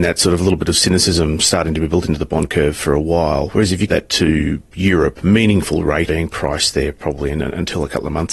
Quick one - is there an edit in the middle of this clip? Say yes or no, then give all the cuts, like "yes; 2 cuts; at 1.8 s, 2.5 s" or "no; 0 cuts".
yes; 2 cuts; at 3.9 s, 6.1 s